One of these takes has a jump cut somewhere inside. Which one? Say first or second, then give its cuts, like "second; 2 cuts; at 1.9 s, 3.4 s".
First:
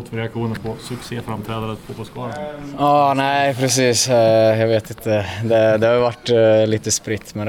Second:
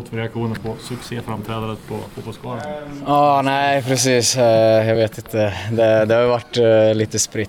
first; 1 cut; at 1.8 s